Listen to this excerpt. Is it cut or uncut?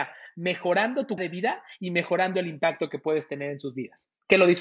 cut